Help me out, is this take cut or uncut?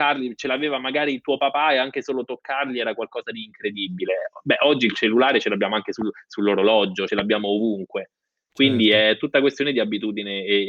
cut